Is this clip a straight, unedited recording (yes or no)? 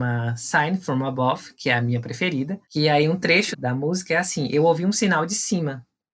no